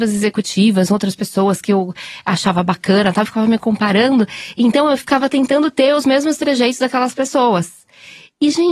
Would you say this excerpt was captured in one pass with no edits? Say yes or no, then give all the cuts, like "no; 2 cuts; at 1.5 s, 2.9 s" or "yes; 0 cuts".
yes; 0 cuts